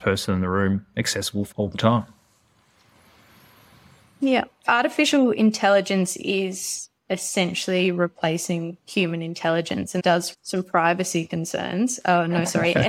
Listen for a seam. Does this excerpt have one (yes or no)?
yes